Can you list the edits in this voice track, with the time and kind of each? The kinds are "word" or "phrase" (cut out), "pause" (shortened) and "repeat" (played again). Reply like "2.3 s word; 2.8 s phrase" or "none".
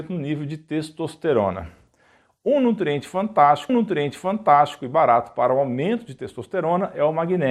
3.7 s repeat

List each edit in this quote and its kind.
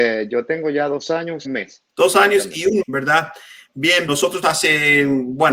1.4 s phrase; 1.9 s pause; 2.8 s word; 4.1 s word; 4.4 s word

